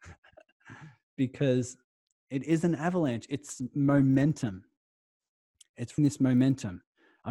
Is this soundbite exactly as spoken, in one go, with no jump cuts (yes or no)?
no